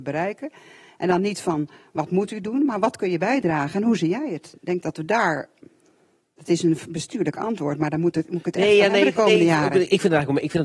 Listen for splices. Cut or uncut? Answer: uncut